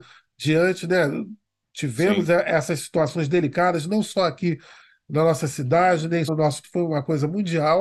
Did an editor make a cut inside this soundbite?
yes; 2 cuts; at 6.3 s, 6.6 s

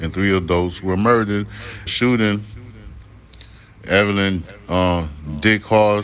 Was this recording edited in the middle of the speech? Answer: yes; 1 cut; at 1.9 s

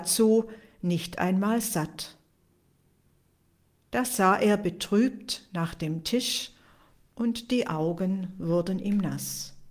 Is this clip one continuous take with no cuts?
yes; 0 cuts

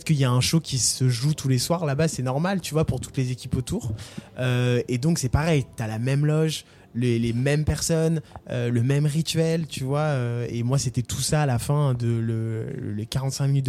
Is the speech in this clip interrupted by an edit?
no; 0 cuts

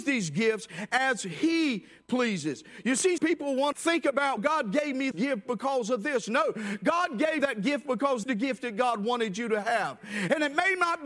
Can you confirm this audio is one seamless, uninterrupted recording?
no; 6 cuts; at 3.2 s, 3.7 s, 4.4 s, 5.1 s, 7.4 s, 8.2 s

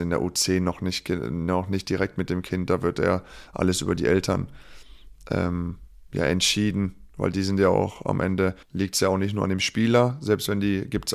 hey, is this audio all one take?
no; 1 cut; at 8.6 s

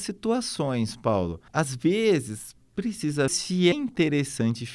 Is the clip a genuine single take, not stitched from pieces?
no; 3 cuts; at 1.5 s, 3.3 s, 3.7 s

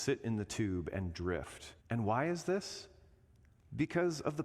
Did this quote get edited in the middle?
yes; 1 cut; at 1.8 s

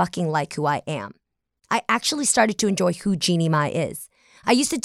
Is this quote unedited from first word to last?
yes; 0 cuts

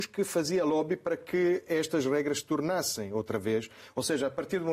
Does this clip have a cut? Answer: no; 0 cuts

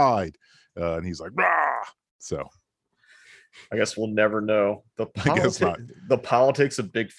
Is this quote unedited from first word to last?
yes; 0 cuts

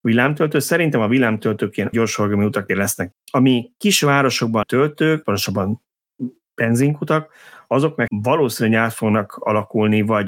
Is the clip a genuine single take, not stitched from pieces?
no; 6 cuts; at 1.9 s, 2.7 s, 3.1 s, 4.6 s, 5.2 s, 8.1 s

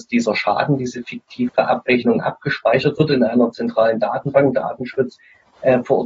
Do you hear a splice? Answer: no; 0 cuts

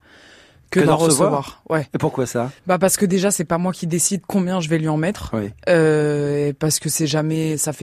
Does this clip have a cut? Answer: yes; 1 cut; at 2.6 s

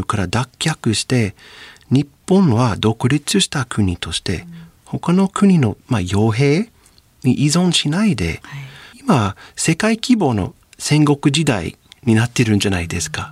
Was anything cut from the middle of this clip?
no; 0 cuts

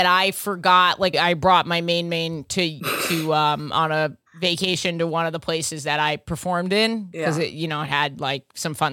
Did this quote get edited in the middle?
yes; 1 cut; at 1.1 s

